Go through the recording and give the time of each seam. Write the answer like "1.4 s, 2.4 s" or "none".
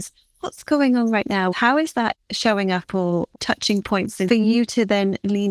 1.5 s, 4.3 s